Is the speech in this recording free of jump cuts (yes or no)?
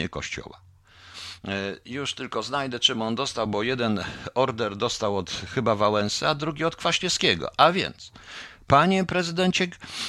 yes